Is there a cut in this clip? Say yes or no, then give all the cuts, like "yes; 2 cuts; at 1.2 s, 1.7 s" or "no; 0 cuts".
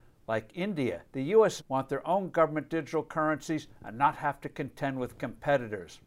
yes; 2 cuts; at 1.1 s, 1.6 s